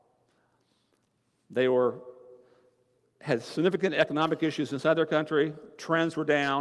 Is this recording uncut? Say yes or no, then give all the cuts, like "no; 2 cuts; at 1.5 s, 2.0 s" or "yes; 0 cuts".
yes; 0 cuts